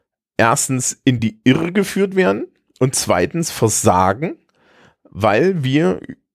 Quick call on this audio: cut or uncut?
uncut